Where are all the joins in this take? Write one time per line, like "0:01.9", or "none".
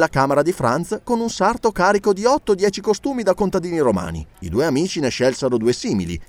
0:04.3